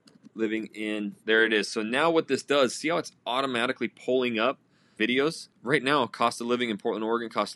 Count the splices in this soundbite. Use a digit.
2